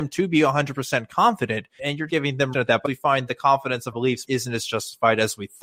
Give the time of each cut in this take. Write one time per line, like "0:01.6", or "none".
0:01.8
0:02.1
0:02.5
0:02.8
0:03.3
0:03.9
0:04.2

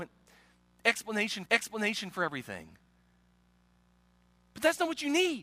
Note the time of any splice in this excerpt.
0:01.5

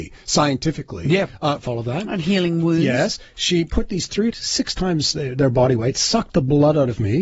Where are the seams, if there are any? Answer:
0:01.7
0:04.3

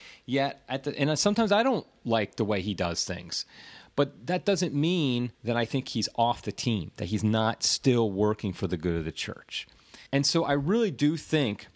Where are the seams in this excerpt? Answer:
0:05.3
0:10.1

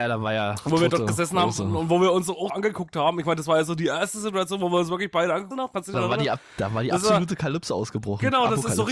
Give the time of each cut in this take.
0:02.5
0:05.5
0:05.9

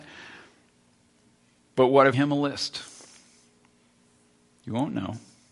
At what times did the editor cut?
0:02.1

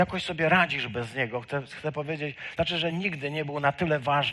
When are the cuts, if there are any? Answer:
none

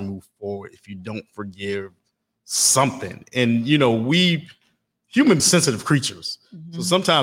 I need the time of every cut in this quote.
0:05.4

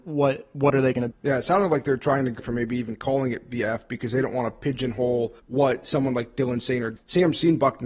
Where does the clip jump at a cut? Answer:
0:01.1
0:02.4
0:05.4
0:07.0

